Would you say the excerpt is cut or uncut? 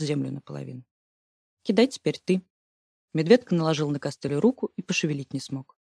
uncut